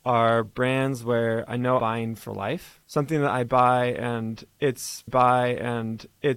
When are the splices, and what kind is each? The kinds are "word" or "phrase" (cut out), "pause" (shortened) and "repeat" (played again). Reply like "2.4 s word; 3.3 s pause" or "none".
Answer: 1.8 s word; 2.8 s pause; 5.1 s repeat